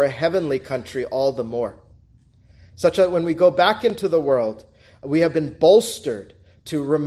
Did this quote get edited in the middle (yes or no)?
no